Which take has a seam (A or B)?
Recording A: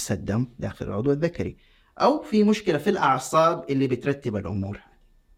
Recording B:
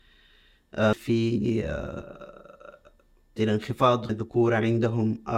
B